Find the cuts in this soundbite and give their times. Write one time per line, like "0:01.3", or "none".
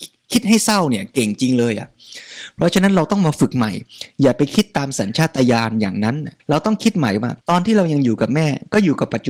0:06.4
0:07.4